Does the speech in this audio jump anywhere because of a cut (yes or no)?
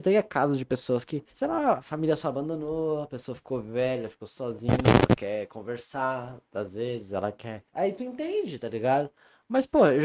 yes